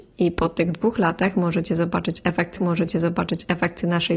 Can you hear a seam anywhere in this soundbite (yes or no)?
yes